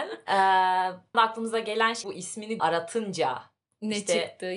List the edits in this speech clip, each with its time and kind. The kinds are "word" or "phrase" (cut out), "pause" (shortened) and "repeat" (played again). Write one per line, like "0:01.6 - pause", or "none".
0:01.1 - word
0:02.0 - word
0:02.6 - word